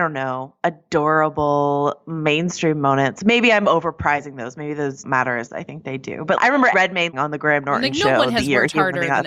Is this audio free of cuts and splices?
no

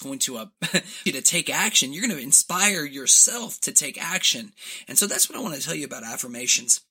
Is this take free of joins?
no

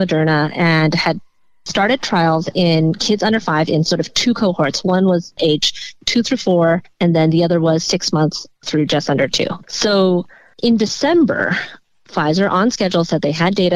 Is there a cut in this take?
no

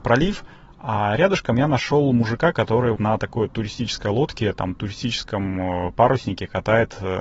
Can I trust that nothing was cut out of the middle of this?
no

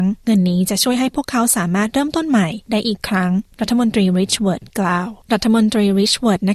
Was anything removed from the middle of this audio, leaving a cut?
yes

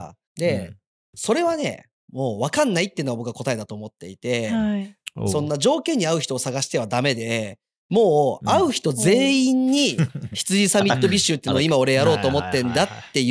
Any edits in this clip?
no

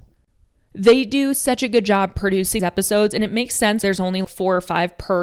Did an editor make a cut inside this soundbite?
yes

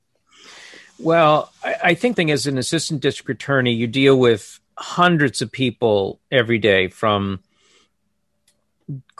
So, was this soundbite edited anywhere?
yes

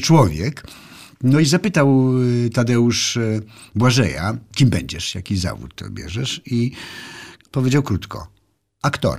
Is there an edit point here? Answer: no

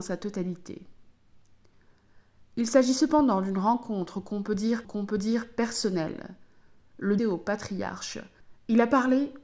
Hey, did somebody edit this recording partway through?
yes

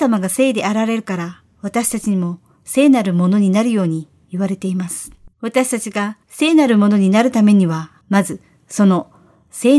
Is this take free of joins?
no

